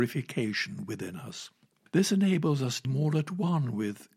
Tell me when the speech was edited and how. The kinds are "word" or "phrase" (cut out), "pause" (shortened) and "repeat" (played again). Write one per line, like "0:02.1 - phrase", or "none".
0:02.8 - word